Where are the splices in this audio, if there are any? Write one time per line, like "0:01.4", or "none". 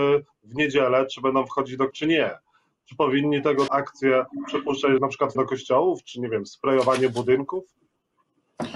0:01.9
0:03.7
0:05.0
0:05.3